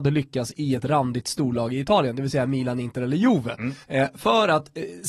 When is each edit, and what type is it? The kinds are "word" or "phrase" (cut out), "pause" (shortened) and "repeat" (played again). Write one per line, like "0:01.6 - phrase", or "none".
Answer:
0:03.8 - pause